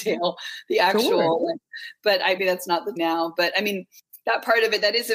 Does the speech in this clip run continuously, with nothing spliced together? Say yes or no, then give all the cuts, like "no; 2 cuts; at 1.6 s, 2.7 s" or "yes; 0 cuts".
no; 2 cuts; at 2.4 s, 3.0 s